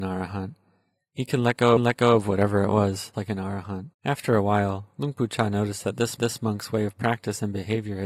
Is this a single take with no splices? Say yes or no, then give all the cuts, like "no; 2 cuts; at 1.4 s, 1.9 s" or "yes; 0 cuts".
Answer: no; 4 cuts; at 1.8 s, 3.1 s, 3.9 s, 6.2 s